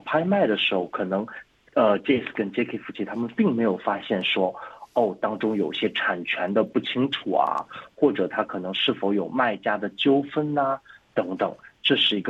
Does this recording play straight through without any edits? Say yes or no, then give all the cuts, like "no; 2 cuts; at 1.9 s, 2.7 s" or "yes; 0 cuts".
yes; 0 cuts